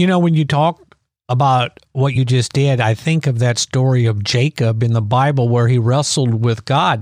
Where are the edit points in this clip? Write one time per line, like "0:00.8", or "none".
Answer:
none